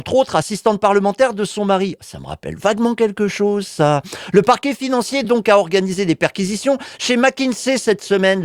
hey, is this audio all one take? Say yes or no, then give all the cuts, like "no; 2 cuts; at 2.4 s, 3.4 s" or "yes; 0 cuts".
yes; 0 cuts